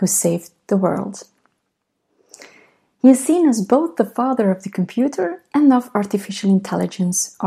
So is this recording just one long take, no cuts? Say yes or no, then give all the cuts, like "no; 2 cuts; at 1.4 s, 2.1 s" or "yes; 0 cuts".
yes; 0 cuts